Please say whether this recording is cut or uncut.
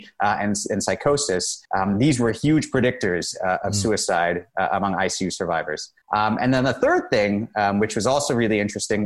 cut